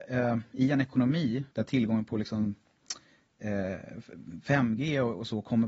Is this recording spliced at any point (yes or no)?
yes